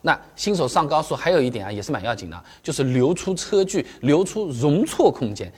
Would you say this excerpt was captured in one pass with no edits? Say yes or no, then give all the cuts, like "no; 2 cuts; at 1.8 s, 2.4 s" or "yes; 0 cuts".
yes; 0 cuts